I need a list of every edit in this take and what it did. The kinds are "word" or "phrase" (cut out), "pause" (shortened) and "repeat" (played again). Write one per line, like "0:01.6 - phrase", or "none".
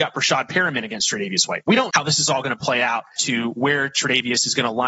0:01.9 - word
0:03.2 - word